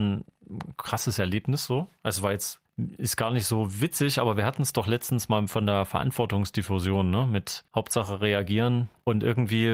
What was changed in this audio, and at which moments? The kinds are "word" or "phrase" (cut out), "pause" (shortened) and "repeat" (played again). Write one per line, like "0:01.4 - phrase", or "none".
0:07.7 - pause

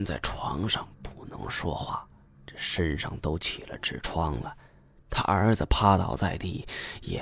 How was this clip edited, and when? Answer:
none

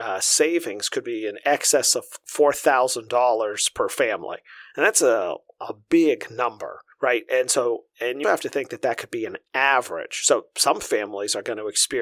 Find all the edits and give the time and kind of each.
0:06.9 - pause
0:08.2 - word

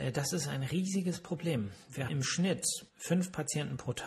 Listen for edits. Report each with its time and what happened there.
0:02.1 - word
0:02.9 - pause

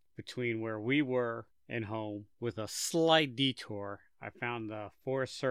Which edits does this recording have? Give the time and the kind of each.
0:01.5 - pause
0:02.3 - pause

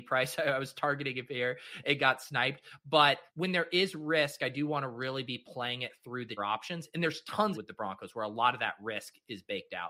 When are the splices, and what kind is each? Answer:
0:03.3 - pause
0:06.4 - word
0:07.5 - phrase

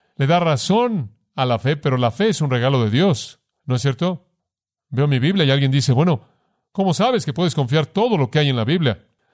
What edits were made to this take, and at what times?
none

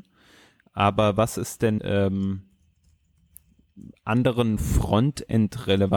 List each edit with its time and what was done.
0:01.8 - word

